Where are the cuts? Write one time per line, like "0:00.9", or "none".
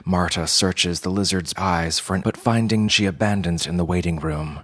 0:01.6
0:02.2
0:02.9
0:03.6